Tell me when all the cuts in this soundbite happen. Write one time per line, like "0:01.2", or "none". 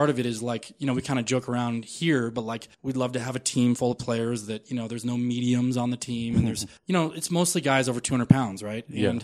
0:02.7
0:06.8

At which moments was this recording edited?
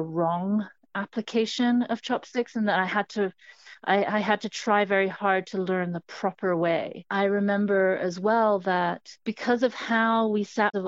none

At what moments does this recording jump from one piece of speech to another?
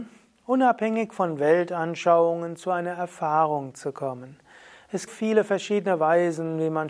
0:05.1

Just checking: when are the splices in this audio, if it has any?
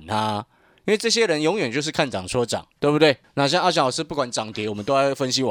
0:02.7
0:03.2

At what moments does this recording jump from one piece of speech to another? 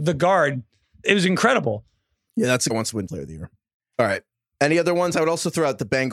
0:01.0
0:02.7
0:03.1
0:04.5

